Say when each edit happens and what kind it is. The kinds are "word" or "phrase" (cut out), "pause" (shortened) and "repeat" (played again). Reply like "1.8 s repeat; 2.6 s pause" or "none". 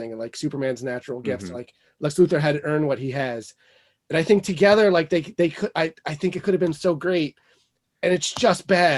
none